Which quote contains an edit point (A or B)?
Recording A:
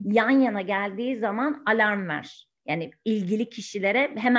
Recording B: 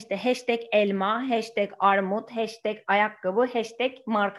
A